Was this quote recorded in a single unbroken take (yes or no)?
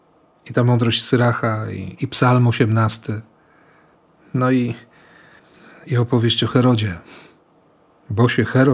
yes